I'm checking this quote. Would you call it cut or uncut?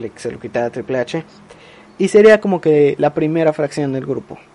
uncut